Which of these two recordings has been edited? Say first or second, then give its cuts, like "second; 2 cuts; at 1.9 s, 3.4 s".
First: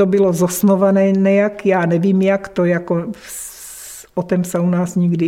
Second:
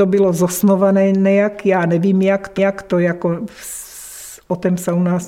second; 1 cut; at 2.6 s